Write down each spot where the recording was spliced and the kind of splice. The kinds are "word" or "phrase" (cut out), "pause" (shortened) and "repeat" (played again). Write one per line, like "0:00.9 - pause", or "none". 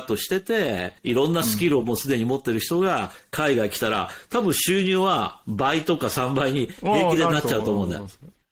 0:01.0 - pause